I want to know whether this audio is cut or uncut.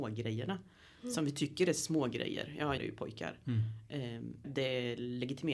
cut